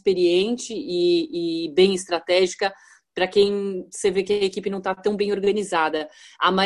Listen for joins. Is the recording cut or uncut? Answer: uncut